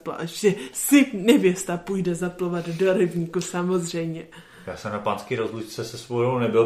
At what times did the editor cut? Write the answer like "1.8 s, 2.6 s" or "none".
none